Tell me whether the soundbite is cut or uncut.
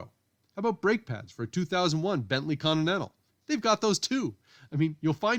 uncut